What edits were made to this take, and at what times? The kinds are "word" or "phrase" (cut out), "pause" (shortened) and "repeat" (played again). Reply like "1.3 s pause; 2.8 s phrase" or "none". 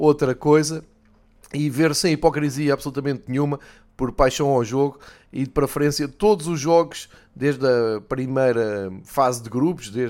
none